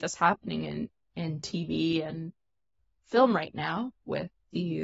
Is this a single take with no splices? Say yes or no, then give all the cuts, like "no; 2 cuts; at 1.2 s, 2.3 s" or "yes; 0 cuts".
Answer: yes; 0 cuts